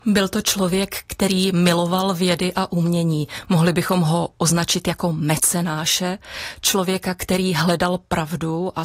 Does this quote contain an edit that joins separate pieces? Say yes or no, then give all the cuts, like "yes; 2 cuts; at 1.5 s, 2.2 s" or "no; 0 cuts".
no; 0 cuts